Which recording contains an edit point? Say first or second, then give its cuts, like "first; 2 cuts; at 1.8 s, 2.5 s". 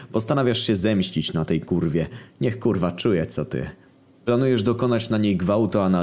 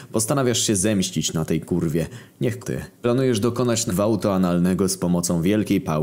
second; 3 cuts; at 2.6 s, 2.9 s, 3.9 s